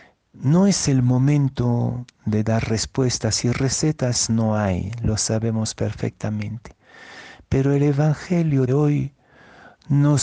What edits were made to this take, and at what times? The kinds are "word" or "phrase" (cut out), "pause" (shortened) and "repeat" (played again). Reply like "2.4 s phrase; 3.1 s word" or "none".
8.7 s word